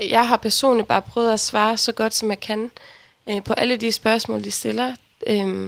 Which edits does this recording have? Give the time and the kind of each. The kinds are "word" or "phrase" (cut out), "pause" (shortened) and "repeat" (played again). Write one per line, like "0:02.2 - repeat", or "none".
none